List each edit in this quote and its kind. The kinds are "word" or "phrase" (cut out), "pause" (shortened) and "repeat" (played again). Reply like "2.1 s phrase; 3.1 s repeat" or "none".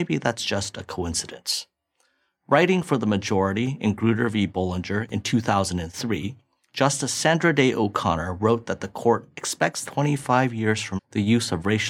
9.9 s word; 11.0 s word